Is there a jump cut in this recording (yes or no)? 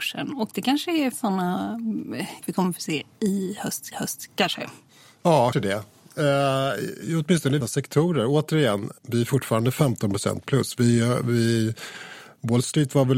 yes